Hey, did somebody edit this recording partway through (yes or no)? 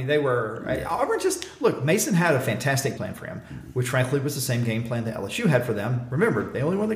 yes